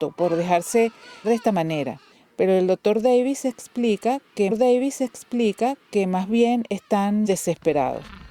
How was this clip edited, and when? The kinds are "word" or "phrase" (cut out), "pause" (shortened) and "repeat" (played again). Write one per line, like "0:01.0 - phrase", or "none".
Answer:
0:01.2 - word
0:02.1 - pause
0:04.5 - repeat
0:07.3 - word